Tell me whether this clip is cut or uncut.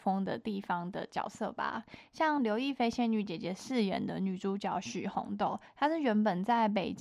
uncut